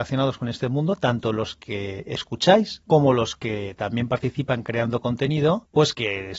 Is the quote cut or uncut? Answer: uncut